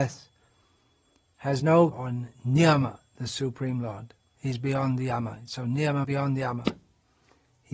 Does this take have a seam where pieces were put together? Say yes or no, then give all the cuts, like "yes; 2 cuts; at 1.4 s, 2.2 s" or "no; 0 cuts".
yes; 3 cuts; at 1.9 s, 4.2 s, 6.0 s